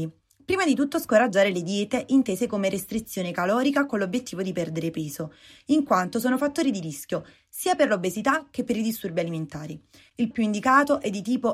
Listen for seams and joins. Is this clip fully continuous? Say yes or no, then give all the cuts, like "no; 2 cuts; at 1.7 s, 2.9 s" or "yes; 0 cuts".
no; 1 cut; at 10.3 s